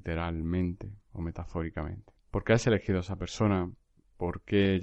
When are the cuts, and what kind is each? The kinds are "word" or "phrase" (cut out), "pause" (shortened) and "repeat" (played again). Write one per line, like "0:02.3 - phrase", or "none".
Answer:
0:02.2 - pause